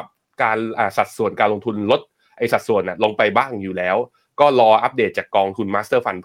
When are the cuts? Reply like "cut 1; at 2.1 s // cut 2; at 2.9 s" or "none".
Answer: none